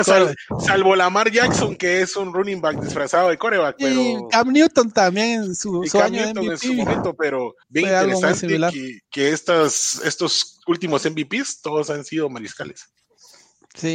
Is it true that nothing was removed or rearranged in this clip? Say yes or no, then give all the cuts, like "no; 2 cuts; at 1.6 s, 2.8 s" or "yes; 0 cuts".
no; 2 cuts; at 7.6 s, 9.0 s